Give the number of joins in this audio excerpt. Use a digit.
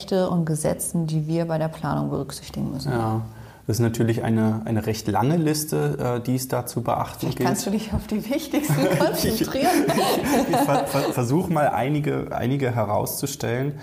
0